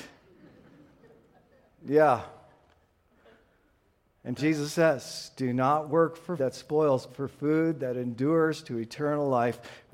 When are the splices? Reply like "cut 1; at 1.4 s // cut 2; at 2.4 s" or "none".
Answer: cut 1; at 4.4 s // cut 2; at 6.4 s // cut 3; at 7.1 s